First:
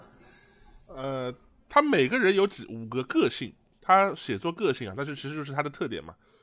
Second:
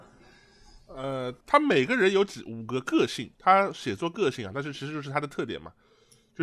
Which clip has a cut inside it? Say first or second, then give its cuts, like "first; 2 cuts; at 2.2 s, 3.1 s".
second; 2 cuts; at 1.4 s, 3.3 s